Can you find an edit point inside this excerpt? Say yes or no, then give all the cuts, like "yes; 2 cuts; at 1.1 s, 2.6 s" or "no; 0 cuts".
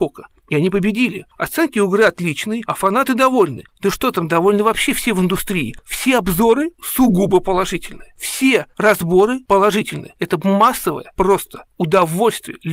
no; 0 cuts